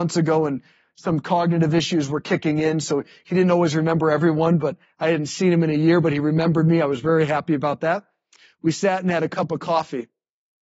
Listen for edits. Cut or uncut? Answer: uncut